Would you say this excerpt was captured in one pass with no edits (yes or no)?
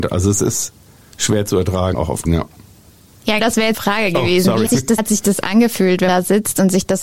no